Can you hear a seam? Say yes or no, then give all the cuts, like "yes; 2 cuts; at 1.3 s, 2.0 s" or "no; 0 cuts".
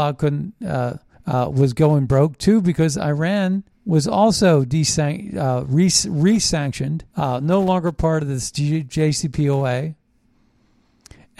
yes; 3 cuts; at 1.1 s, 3.7 s, 7.1 s